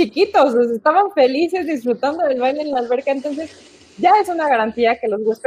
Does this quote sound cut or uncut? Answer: uncut